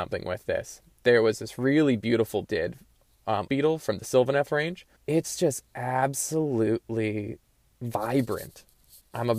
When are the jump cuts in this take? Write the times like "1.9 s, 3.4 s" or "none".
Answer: 2.4 s, 3.5 s, 4.9 s